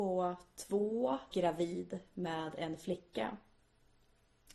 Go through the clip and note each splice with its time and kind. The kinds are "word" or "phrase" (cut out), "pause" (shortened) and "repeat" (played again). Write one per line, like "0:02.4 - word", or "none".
0:01.3 - phrase